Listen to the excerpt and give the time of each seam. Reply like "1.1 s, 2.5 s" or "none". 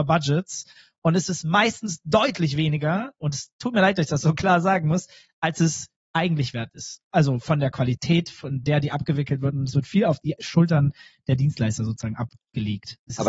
none